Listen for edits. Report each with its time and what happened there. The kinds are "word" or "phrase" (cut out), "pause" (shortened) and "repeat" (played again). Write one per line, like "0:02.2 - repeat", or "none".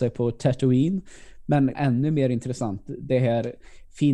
0:01.7 - word